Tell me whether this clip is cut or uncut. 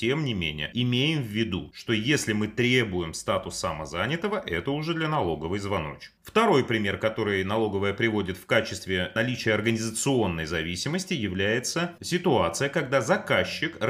uncut